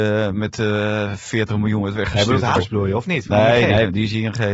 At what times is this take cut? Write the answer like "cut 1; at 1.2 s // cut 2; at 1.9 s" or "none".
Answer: cut 1; at 2.6 s